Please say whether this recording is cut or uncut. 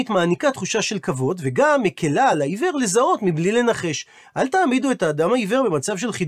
uncut